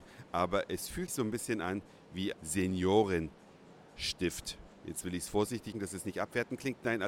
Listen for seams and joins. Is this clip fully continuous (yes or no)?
no